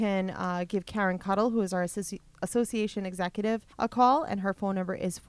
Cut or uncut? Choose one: cut